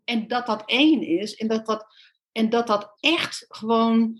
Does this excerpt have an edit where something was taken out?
no; 0 cuts

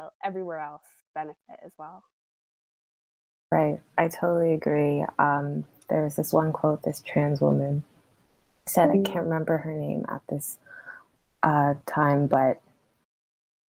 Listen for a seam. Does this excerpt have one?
no; 0 cuts

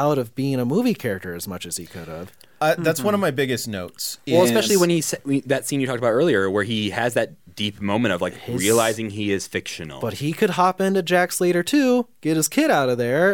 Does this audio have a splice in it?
no; 0 cuts

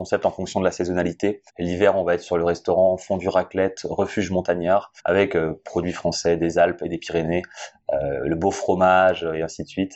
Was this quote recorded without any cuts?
no; 2 cuts; at 1.5 s, 5.0 s

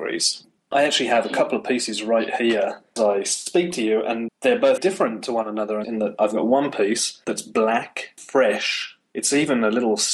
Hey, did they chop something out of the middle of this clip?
yes; 4 cuts; at 3.0 s, 4.3 s, 4.8 s, 8.2 s

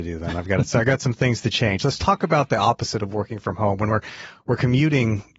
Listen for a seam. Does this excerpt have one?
no; 0 cuts

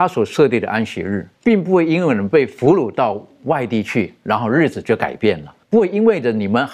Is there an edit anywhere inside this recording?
yes; 2 cuts; at 1.3 s, 5.6 s

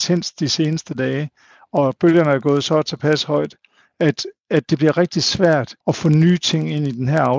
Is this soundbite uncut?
no; 1 cut; at 5.8 s

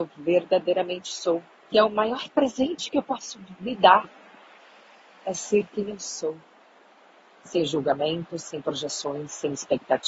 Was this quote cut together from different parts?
yes; 1 cut; at 1.5 s

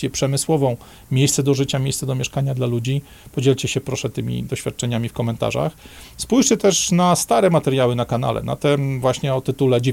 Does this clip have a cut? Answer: no; 0 cuts

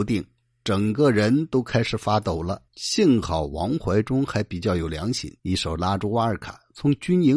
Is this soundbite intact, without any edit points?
no; 2 cuts; at 2.7 s, 5.4 s

